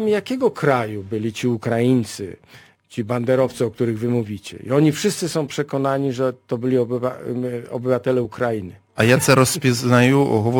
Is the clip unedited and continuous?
yes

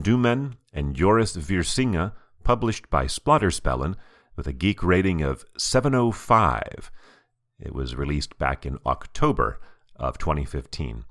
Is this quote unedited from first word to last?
yes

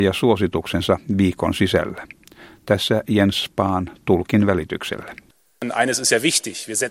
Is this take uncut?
yes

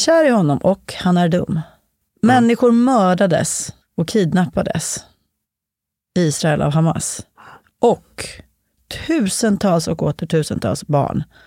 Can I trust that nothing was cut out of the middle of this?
no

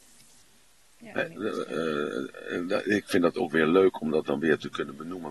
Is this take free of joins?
yes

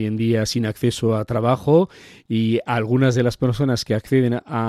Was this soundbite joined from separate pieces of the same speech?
no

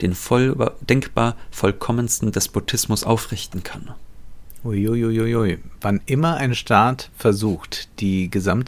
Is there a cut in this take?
no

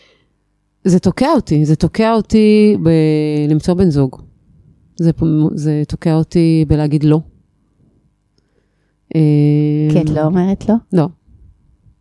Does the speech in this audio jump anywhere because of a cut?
no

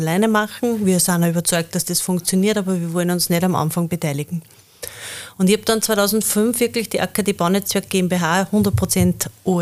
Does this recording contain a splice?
no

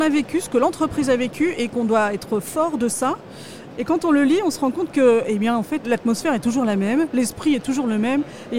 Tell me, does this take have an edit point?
yes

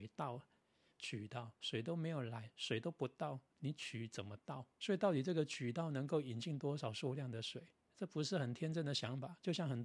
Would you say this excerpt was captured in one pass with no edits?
no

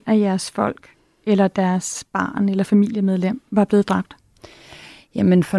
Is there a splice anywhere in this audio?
no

